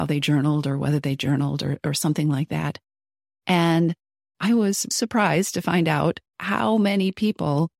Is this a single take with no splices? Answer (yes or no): no